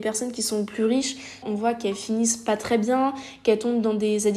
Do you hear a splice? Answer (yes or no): yes